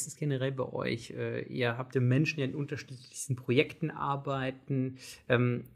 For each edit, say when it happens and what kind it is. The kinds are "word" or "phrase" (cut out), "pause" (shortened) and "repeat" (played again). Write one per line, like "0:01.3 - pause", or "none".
0:01.9 - phrase